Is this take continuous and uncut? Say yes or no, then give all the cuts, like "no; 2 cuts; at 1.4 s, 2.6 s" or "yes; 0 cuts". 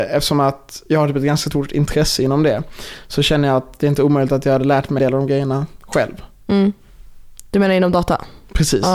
no; 1 cut; at 5.0 s